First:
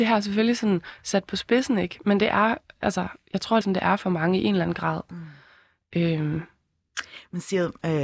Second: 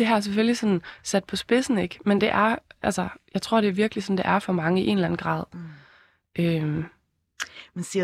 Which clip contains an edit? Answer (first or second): first